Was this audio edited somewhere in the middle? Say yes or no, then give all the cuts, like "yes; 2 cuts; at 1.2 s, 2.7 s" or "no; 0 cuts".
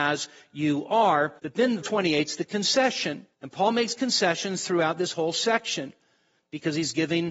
yes; 3 cuts; at 1.4 s, 1.8 s, 3.3 s